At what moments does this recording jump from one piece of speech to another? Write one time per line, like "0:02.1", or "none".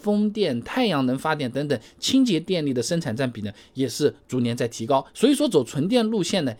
0:05.1